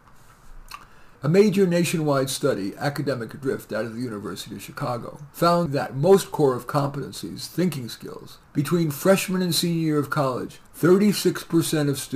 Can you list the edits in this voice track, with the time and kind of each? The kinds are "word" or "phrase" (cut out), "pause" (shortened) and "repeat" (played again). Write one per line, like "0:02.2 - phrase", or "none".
0:01.1 - pause
0:05.3 - pause
0:08.4 - pause
0:10.7 - pause